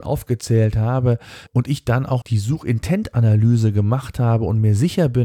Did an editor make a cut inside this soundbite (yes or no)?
yes